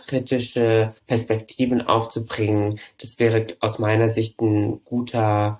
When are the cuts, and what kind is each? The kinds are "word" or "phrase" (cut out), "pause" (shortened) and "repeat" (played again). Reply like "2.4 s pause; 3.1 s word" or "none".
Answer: 1.0 s pause